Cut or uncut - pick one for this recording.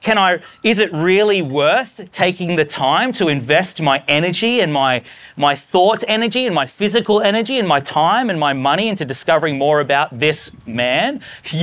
uncut